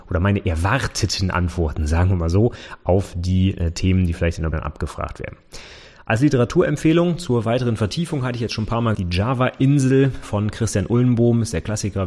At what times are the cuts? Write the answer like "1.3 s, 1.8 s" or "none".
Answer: 4.5 s, 8.9 s